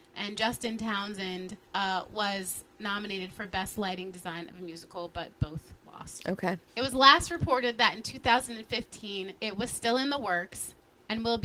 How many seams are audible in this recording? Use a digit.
3